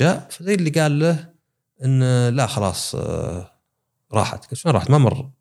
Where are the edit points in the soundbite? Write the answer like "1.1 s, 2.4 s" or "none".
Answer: none